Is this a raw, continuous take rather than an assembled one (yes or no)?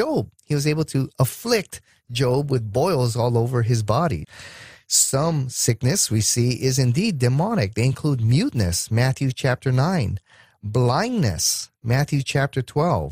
yes